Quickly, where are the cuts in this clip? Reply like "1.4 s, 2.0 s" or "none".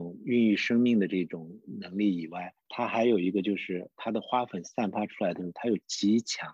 2.6 s